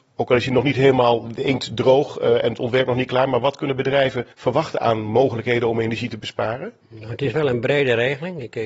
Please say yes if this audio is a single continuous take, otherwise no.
no